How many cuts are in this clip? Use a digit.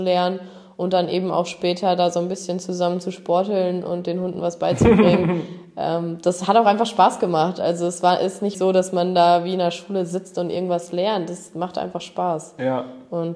1